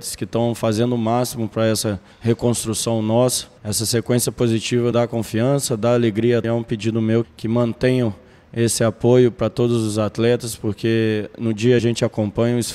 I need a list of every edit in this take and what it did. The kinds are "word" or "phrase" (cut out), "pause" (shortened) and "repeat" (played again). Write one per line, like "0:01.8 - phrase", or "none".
0:02.1 - pause
0:03.6 - pause
0:04.9 - word
0:06.4 - word
0:07.2 - word
0:11.8 - phrase